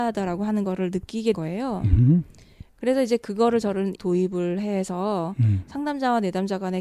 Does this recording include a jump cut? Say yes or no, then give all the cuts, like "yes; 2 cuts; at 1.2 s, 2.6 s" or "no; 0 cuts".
yes; 2 cuts; at 1.3 s, 4.0 s